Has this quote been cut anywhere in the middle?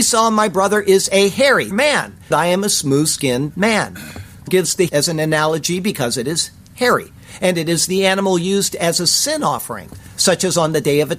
yes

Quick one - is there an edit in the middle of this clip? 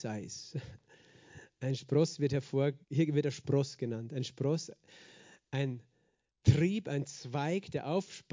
yes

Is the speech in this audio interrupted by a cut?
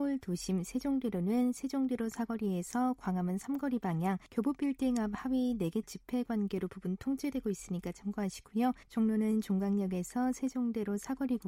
yes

